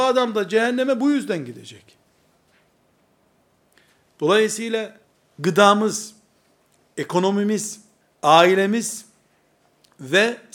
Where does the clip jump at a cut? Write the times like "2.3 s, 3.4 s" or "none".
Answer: 5.0 s, 8.0 s